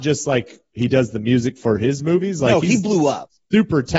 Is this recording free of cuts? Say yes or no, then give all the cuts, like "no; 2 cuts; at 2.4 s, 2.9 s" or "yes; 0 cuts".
yes; 0 cuts